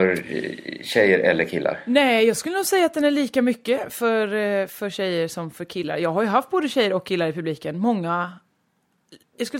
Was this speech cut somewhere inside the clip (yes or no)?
no